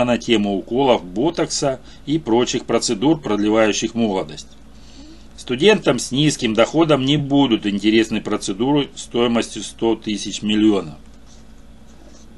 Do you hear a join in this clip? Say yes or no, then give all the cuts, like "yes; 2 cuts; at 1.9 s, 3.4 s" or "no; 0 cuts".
no; 0 cuts